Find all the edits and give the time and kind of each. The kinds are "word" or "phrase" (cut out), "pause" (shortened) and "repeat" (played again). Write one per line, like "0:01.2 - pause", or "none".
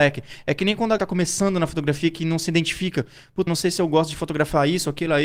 0:01.0 - word
0:03.5 - word